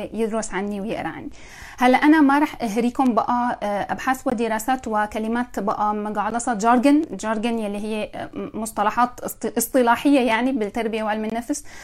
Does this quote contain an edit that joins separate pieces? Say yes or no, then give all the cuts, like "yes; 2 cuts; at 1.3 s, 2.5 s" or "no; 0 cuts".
no; 0 cuts